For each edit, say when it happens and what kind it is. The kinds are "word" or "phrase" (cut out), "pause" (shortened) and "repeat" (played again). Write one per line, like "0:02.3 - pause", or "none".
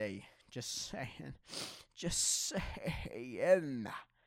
none